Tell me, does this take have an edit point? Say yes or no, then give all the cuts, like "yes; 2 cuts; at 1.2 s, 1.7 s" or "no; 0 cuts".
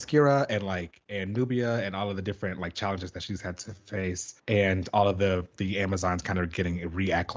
yes; 1 cut; at 4.4 s